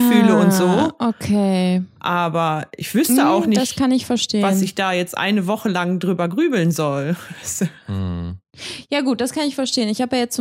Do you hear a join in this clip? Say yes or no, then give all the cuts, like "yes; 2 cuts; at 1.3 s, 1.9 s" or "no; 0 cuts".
no; 0 cuts